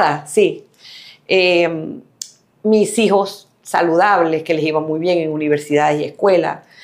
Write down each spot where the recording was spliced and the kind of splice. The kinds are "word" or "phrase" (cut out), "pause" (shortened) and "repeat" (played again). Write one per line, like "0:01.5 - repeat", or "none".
none